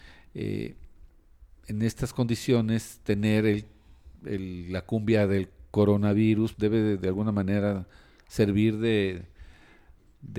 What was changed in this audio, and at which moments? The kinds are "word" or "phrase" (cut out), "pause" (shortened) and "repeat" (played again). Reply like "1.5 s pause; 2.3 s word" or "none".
6.5 s word